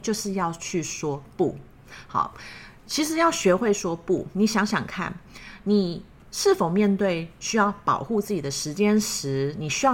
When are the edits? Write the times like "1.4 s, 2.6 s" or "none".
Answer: none

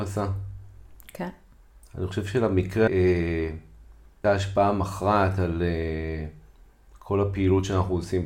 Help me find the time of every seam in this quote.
2.9 s, 4.2 s

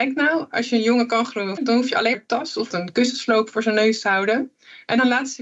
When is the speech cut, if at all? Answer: 1.6 s, 2.1 s, 2.7 s

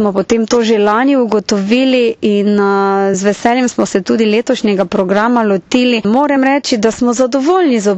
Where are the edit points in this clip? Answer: none

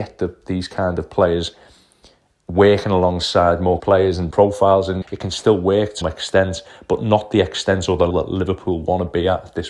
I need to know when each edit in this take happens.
3.8 s, 4.3 s, 5.0 s, 6.0 s, 8.1 s

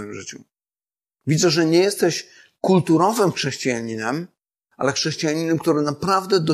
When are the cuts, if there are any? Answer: none

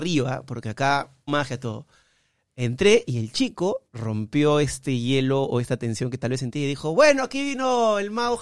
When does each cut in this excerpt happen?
1.3 s, 3.9 s

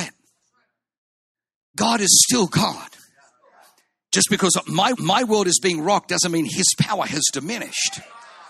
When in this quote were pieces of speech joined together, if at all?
4.9 s

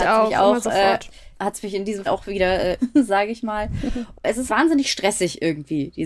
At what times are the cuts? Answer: 1.3 s, 2.1 s, 2.8 s, 4.5 s

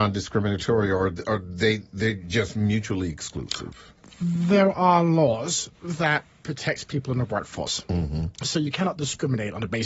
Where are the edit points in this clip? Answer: 5.7 s, 8.3 s

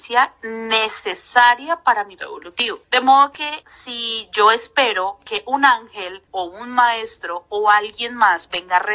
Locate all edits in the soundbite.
2.2 s, 6.3 s

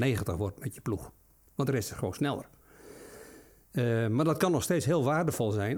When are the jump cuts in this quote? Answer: none

